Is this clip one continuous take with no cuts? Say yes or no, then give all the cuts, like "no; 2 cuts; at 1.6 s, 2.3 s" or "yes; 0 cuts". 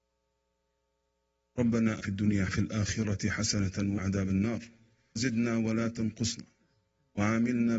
no; 4 cuts; at 2.0 s, 2.5 s, 4.0 s, 5.2 s